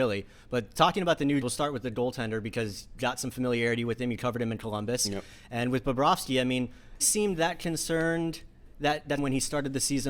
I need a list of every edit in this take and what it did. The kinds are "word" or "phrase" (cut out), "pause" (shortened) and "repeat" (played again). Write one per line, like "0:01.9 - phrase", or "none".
0:01.4 - word
0:03.0 - word
0:07.0 - word
0:09.2 - phrase